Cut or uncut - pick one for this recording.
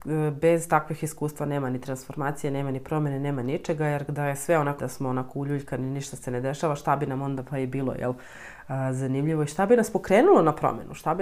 cut